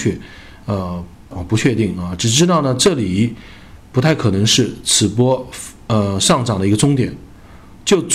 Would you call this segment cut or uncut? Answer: cut